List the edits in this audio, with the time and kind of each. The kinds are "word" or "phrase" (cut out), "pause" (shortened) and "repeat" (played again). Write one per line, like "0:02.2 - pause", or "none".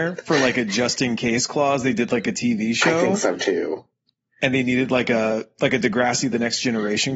none